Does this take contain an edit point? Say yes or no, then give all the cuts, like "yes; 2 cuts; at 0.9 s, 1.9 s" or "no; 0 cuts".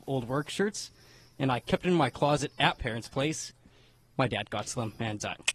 yes; 1 cut; at 2.8 s